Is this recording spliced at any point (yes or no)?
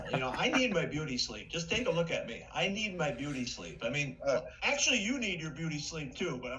no